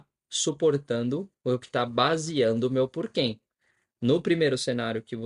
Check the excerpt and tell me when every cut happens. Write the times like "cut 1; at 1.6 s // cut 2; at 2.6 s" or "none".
none